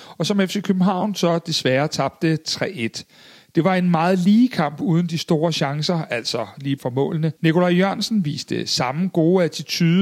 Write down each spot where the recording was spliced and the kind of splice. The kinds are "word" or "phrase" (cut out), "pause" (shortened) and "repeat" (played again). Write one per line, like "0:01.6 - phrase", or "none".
0:06.8 - word
0:07.4 - pause